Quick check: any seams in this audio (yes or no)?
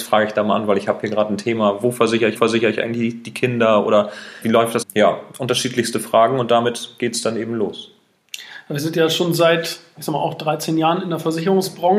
yes